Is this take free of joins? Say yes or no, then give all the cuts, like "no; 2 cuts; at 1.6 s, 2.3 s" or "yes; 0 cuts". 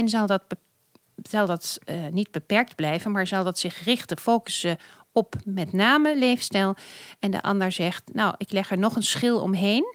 yes; 0 cuts